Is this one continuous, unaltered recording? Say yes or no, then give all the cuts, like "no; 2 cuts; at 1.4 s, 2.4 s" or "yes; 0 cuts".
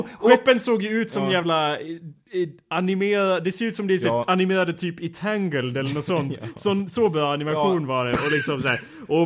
yes; 0 cuts